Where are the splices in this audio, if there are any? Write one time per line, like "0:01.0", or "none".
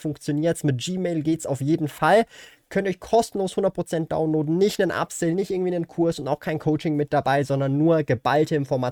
none